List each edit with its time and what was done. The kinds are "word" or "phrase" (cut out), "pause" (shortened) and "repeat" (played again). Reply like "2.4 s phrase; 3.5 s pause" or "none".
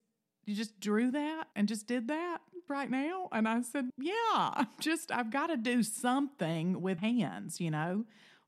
1.5 s pause; 2.7 s word; 3.9 s word; 7.0 s word